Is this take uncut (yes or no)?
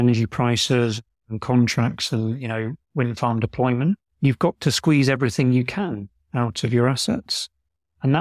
no